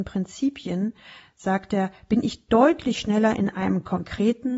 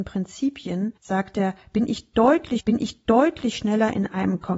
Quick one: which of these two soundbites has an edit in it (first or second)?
second